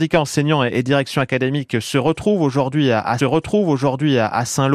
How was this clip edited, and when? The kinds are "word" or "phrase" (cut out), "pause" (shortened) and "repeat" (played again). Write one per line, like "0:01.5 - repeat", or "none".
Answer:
0:03.2 - repeat